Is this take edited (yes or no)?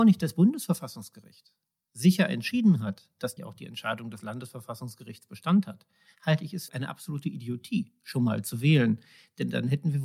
yes